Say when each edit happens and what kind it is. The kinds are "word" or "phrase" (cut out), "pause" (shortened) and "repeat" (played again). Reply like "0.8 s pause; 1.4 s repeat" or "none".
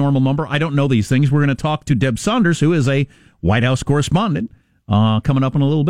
none